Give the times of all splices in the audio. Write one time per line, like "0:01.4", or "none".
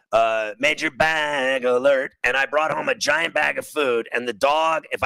none